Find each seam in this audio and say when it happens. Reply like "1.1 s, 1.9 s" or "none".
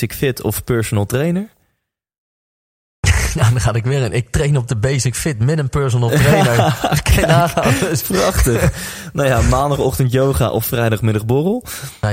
none